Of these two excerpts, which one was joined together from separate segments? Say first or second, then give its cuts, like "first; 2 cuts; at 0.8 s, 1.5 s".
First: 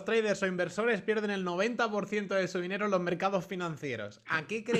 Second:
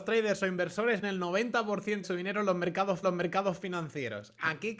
second; 3 cuts; at 1.0 s, 2.0 s, 3.0 s